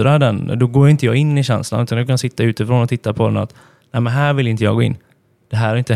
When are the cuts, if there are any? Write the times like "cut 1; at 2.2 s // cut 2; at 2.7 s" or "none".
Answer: none